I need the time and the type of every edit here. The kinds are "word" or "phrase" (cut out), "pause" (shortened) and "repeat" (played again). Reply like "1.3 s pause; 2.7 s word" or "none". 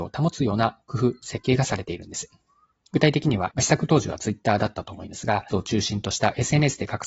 2.7 s pause; 3.5 s word; 5.5 s word